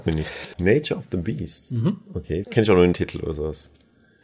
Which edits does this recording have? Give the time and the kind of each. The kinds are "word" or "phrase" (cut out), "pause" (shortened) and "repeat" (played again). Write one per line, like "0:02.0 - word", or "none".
0:02.4 - word
0:02.9 - word